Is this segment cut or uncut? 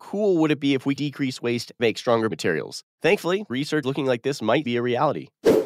cut